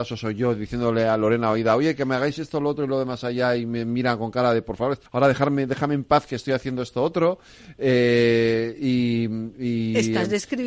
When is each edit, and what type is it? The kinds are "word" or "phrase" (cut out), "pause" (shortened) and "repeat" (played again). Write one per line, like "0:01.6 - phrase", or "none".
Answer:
0:05.1 - pause